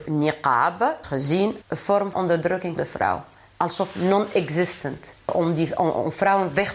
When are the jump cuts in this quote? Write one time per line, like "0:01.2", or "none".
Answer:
0:01.0
0:01.6
0:02.1
0:02.8